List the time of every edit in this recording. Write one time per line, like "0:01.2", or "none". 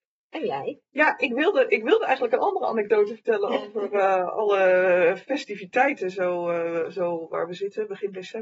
none

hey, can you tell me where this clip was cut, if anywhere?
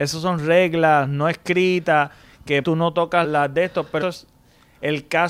0:02.6
0:03.2
0:04.0

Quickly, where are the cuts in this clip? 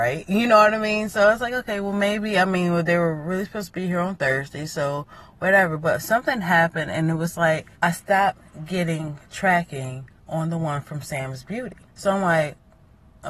0:07.7
0:11.9

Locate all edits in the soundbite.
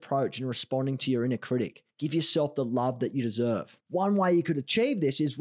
0:01.9
0:03.8

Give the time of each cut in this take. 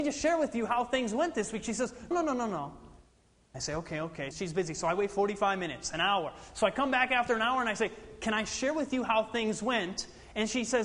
0:02.1
0:04.3

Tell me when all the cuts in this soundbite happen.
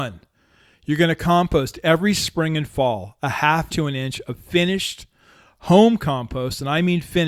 0:03.7

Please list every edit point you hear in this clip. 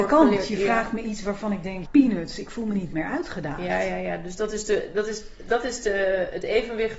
0:01.8

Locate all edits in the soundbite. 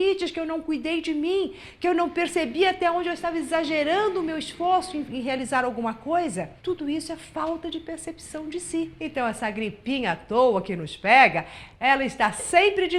0:06.6
0:09.0

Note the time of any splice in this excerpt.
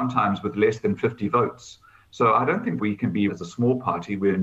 0:02.8
0:03.3

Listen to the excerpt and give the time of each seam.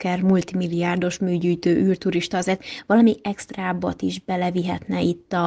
none

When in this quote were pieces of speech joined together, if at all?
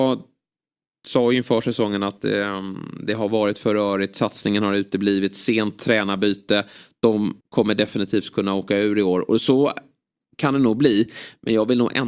0:07.4

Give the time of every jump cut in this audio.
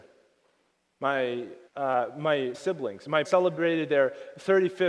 0:01.7
0:02.5
0:03.2

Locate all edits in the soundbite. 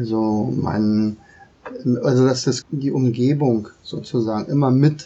0:02.6

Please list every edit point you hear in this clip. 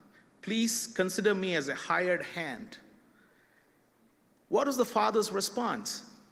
none

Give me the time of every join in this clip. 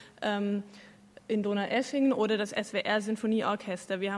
none

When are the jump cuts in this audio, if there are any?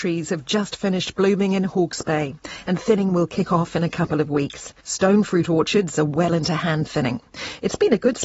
0:04.8

